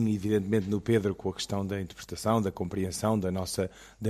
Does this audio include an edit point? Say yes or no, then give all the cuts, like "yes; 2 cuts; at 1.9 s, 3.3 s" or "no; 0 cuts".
no; 0 cuts